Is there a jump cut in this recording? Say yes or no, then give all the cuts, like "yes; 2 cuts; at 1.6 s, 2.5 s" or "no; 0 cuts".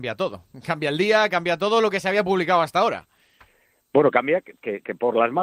no; 0 cuts